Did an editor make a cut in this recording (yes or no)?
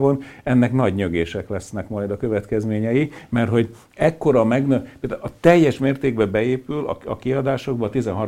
no